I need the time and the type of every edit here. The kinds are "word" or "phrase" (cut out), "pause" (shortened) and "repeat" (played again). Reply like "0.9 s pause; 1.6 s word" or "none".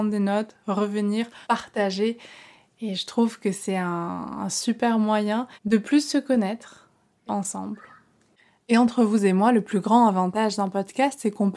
1.4 s pause; 5.6 s pause; 7.3 s phrase